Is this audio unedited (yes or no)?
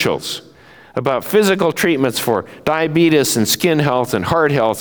yes